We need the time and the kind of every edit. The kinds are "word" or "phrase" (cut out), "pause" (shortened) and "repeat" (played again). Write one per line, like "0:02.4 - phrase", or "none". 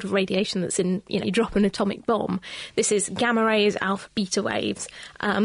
0:01.2 - word
0:04.1 - word